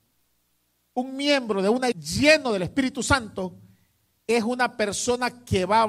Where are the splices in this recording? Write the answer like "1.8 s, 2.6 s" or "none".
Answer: 1.9 s